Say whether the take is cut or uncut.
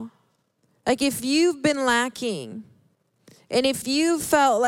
uncut